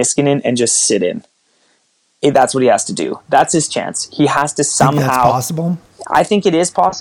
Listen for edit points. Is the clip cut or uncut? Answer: uncut